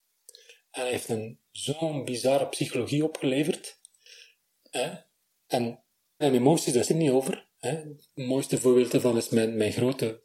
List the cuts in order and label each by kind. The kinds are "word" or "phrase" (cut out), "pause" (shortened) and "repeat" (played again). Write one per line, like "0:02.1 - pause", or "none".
0:06.2 - word
0:06.9 - word
0:07.5 - pause